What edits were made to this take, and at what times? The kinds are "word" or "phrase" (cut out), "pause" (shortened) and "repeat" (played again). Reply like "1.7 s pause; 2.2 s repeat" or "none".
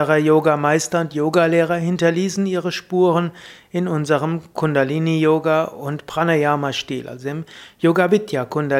none